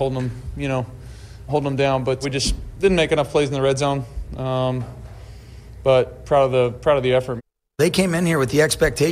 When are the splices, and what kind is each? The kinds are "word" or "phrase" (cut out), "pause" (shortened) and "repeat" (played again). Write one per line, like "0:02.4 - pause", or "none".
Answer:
0:01.5 - word
0:02.2 - word

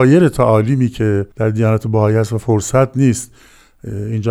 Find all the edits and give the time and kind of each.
0:01.3 - pause

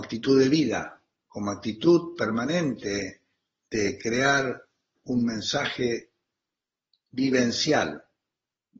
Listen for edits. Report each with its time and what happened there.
none

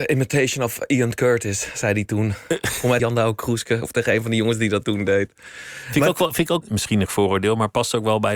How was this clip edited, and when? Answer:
0:03.0 - word
0:06.6 - word
0:07.1 - word

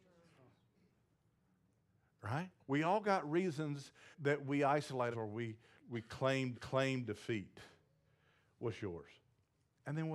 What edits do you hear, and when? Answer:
0:02.6 - pause
0:04.1 - word
0:05.1 - word
0:05.8 - word
0:06.5 - repeat

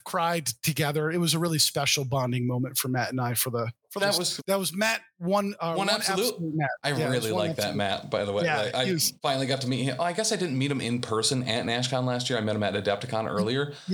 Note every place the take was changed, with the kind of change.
0:04.0 - phrase
0:04.4 - phrase
0:09.2 - pause

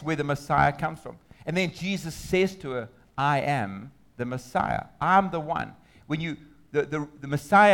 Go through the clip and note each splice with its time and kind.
none

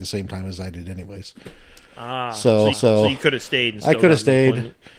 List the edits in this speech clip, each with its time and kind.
0:01.9 - pause
0:02.7 - repeat

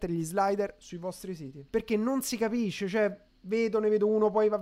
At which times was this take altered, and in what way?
0:01.7 - pause
0:03.3 - pause

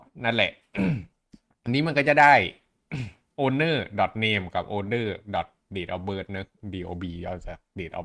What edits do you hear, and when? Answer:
none

